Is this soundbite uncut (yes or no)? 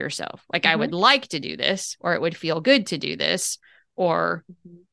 yes